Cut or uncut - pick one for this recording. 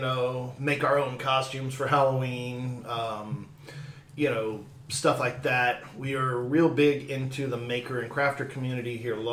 uncut